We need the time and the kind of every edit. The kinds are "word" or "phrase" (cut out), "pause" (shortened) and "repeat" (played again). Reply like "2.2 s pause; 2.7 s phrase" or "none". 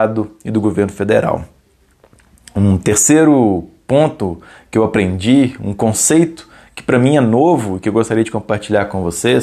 none